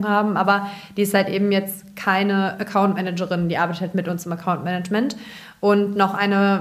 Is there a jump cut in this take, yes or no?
no